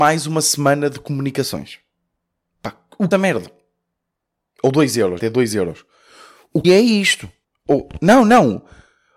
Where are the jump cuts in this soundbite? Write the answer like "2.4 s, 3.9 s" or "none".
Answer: 3.1 s, 5.2 s, 6.6 s, 7.4 s